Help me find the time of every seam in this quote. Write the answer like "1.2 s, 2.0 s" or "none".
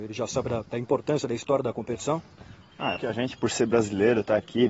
3.0 s